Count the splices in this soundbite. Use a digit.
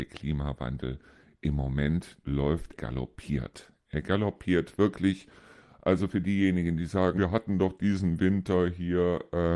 3